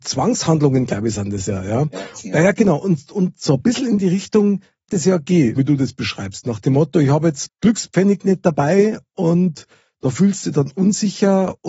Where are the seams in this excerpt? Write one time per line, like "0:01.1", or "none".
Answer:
0:02.2
0:04.9
0:05.6
0:07.5